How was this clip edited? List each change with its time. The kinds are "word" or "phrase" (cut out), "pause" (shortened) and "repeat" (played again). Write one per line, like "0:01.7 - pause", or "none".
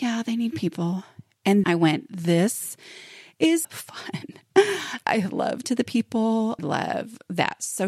0:01.6 - word
0:03.6 - word
0:05.0 - word
0:05.6 - word
0:06.6 - word